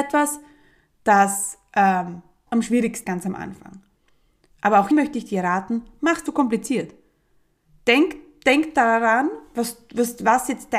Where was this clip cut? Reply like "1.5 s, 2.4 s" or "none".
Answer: 2.5 s, 3.0 s, 4.9 s, 6.3 s